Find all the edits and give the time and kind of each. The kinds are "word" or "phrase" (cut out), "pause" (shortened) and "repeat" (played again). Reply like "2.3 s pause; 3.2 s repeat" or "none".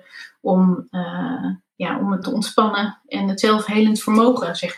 2.2 s word